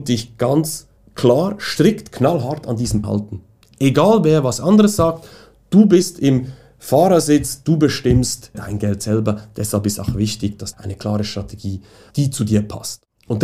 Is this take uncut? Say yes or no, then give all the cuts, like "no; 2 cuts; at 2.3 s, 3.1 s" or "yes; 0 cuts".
no; 4 cuts; at 3.0 s, 8.5 s, 10.7 s, 12.1 s